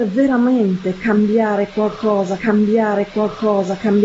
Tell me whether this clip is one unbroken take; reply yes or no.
no